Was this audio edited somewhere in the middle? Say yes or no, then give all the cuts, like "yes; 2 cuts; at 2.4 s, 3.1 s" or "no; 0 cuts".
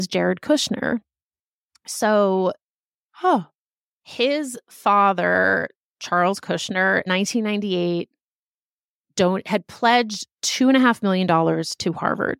yes; 1 cut; at 7.1 s